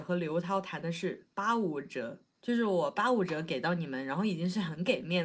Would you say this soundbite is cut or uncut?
uncut